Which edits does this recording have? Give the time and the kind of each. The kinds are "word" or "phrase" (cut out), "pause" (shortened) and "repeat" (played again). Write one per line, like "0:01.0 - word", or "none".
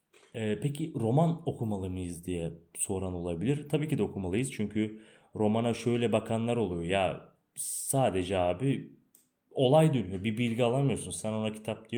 none